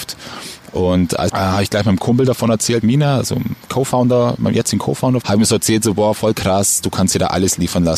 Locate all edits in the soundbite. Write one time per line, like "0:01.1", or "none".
0:01.3
0:02.8
0:05.2